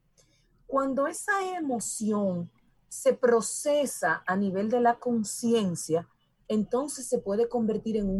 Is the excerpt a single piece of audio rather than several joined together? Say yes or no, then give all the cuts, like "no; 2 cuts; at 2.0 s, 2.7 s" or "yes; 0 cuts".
yes; 0 cuts